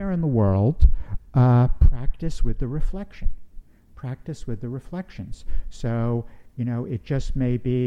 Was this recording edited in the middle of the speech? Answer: no; 0 cuts

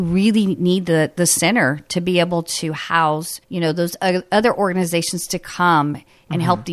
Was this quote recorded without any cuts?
no; 1 cut; at 3.4 s

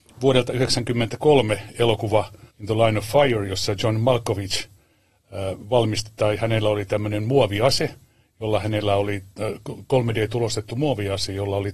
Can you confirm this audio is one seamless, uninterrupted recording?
no; 1 cut; at 2.5 s

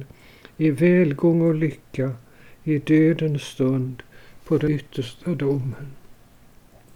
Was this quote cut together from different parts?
no; 0 cuts

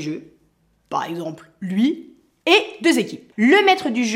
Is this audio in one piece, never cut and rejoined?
yes; 0 cuts

